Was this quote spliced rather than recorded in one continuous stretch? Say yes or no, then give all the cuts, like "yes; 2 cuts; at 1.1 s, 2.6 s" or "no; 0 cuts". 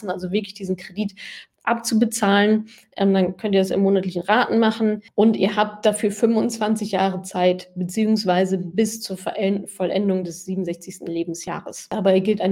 no; 0 cuts